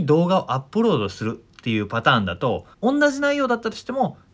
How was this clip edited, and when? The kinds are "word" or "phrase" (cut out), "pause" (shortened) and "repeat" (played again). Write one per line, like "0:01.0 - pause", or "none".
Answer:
0:02.7 - pause